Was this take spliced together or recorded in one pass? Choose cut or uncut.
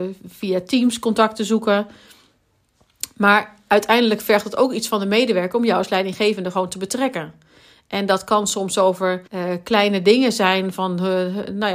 cut